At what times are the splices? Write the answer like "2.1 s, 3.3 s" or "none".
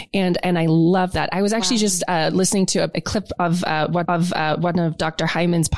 4.0 s